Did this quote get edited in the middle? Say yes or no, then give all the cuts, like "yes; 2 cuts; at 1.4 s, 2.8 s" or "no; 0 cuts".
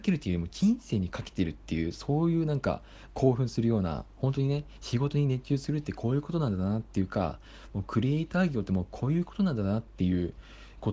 no; 0 cuts